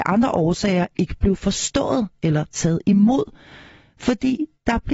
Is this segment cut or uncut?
uncut